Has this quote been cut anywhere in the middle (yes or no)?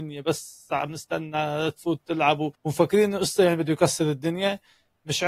yes